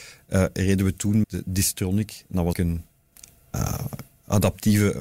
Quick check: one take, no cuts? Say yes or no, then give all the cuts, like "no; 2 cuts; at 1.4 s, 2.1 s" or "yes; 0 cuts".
no; 2 cuts; at 1.2 s, 2.5 s